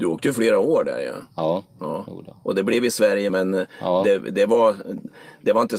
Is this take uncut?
no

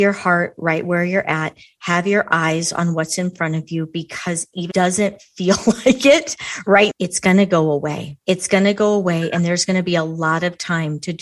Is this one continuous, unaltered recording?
no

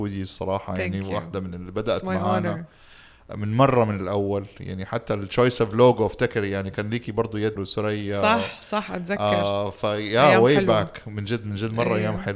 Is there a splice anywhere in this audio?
yes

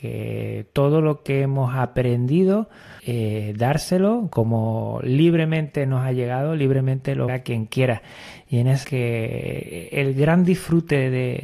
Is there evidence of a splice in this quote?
yes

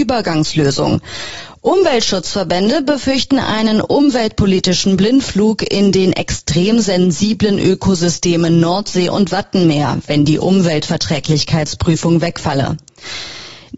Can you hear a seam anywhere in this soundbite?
no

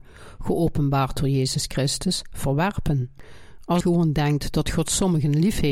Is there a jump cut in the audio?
yes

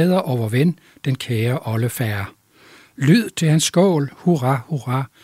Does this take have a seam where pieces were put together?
no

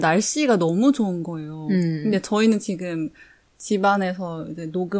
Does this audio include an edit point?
no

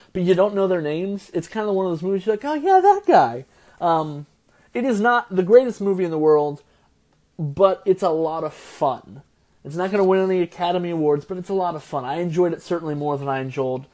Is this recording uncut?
yes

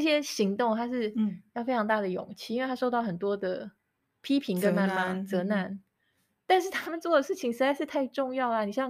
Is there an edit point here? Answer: no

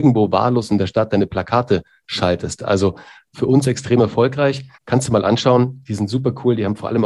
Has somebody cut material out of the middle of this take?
yes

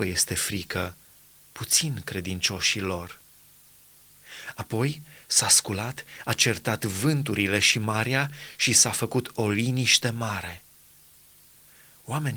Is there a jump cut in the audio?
no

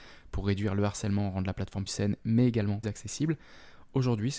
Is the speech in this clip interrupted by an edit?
yes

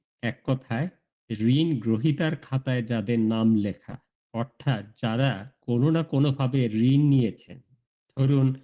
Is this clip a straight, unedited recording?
yes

